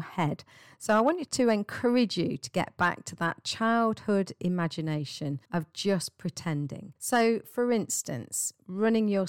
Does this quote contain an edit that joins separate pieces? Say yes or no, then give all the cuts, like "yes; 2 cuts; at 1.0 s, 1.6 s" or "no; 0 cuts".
yes; 2 cuts; at 5.5 s, 7.0 s